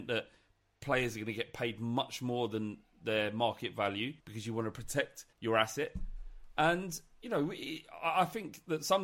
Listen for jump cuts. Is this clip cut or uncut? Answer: cut